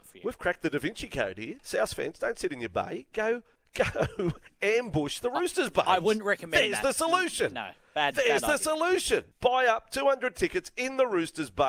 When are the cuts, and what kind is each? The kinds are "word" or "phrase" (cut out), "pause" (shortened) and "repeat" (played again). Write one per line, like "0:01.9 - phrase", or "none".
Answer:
0:03.6 - pause
0:09.3 - pause